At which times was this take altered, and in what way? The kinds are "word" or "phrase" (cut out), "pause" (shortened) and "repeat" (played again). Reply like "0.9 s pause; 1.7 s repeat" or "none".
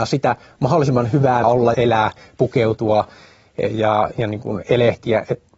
1.4 s phrase; 1.7 s word